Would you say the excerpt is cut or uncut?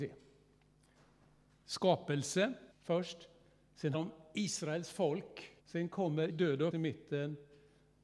cut